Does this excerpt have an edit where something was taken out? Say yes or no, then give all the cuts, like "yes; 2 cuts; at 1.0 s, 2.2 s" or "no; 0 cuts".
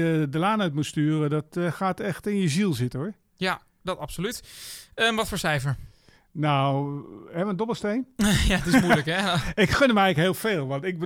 no; 0 cuts